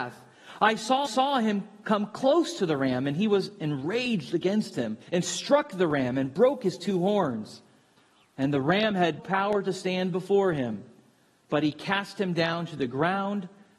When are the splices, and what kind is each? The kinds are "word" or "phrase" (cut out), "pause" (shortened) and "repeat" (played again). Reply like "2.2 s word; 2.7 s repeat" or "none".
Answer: 1.0 s repeat; 5.0 s pause; 9.2 s word